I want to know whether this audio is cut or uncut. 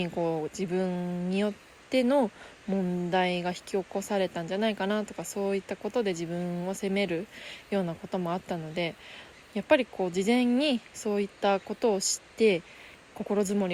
cut